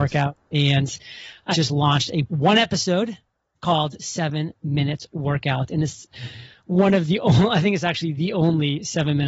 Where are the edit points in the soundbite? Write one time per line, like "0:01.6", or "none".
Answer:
0:01.5
0:02.3